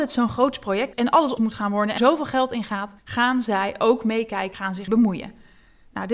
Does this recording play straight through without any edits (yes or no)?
no